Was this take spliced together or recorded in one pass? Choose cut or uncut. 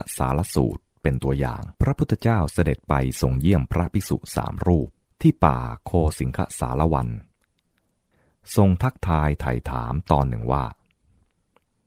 cut